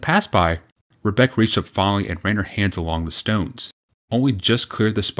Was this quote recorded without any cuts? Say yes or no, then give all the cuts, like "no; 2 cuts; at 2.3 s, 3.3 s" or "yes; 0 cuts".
no; 1 cut; at 4.1 s